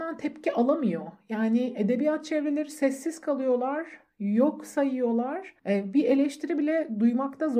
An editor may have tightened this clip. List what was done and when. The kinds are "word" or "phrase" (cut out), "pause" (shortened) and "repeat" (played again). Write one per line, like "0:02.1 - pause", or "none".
0:05.6 - pause